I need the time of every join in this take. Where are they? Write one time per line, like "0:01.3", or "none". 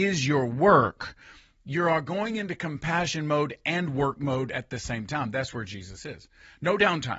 none